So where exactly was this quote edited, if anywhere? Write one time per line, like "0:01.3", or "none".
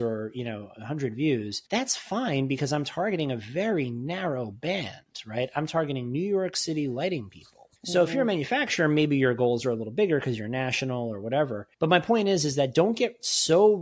0:01.7
0:07.8
0:11.7